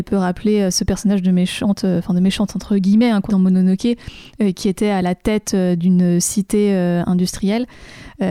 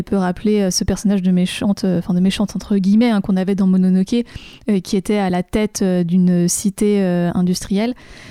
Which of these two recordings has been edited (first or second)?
first